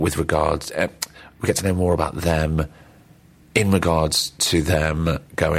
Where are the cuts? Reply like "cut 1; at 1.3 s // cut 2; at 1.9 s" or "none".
none